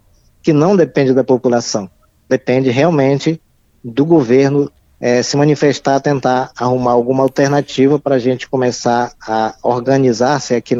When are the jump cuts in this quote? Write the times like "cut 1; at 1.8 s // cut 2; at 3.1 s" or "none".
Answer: none